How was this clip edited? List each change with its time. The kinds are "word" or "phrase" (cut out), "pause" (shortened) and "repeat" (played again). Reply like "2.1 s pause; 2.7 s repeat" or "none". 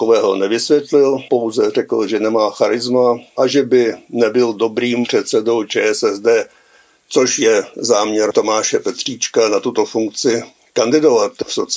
none